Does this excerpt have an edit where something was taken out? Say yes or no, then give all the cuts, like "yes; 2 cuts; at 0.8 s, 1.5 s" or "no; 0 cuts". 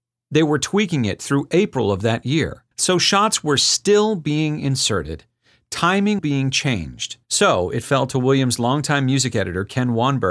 yes; 3 cuts; at 2.7 s, 6.2 s, 7.2 s